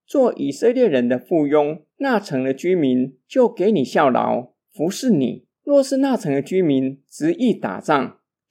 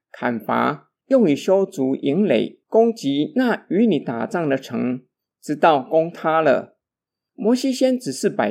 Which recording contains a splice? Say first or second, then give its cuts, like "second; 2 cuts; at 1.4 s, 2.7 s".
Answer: first; 2 cuts; at 1.9 s, 5.5 s